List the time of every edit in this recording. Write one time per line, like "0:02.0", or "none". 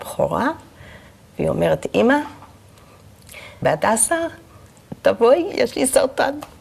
0:03.6